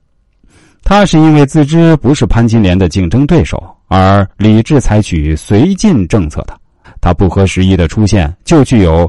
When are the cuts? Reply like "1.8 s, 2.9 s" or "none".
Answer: 6.8 s